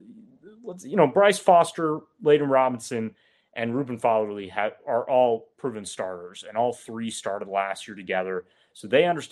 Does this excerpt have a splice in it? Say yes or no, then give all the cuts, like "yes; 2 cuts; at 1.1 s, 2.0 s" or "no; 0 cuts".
no; 0 cuts